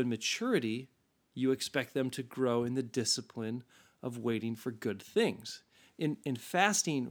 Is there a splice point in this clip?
no; 0 cuts

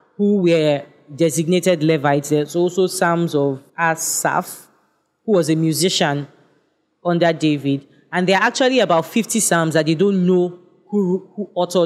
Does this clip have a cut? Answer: yes; 1 cut; at 3.7 s

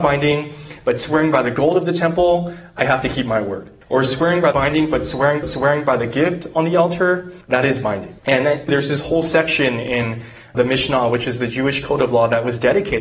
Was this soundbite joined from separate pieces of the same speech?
yes; 7 cuts; at 3.8 s, 4.5 s, 5.4 s, 7.4 s, 8.2 s, 8.7 s, 10.5 s

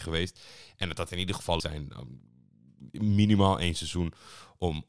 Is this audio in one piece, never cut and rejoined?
no; 1 cut; at 1.6 s

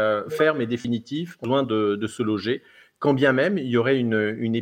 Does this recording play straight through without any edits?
yes; 0 cuts

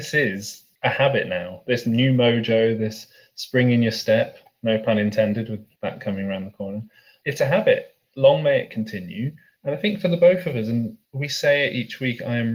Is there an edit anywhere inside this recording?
no; 0 cuts

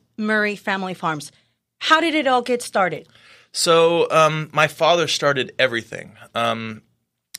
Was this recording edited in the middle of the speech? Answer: no; 0 cuts

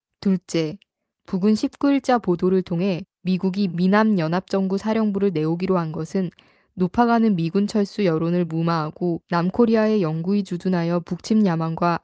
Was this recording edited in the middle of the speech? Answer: no; 0 cuts

